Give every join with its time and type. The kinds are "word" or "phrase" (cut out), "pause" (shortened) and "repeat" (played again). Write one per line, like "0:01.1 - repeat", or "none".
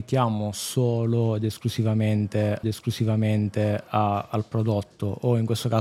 0:02.6 - repeat

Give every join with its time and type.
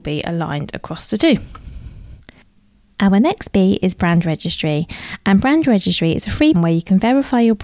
0:06.5 - word

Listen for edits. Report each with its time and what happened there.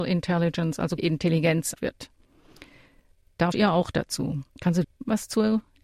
0:01.0 - word
0:01.7 - word
0:03.5 - word
0:04.5 - pause
0:04.8 - word

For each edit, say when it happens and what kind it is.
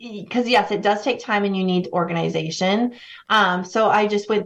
none

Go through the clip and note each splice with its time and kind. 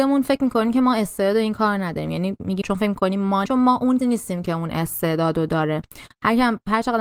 0:02.6 - word
0:03.5 - word
0:04.0 - word

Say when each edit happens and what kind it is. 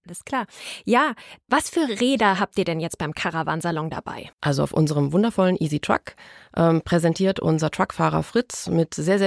0:04.3 - pause

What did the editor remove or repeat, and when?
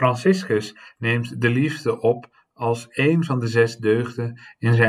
none

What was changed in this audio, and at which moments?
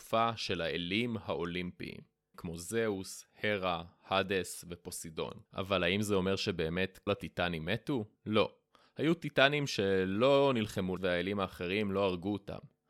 0:02.3 - word
0:05.5 - pause
0:07.1 - word
0:08.2 - pause
0:11.0 - phrase

